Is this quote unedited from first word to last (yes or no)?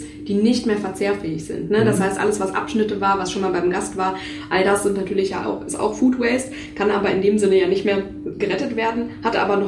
yes